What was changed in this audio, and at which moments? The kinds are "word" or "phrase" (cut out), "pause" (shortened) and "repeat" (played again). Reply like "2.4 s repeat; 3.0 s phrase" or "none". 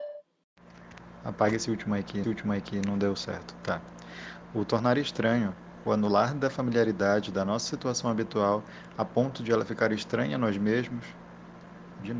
2.2 s repeat